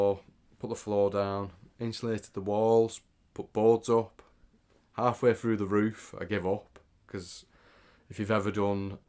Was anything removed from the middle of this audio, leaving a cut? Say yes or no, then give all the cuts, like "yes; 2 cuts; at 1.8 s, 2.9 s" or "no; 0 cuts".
no; 0 cuts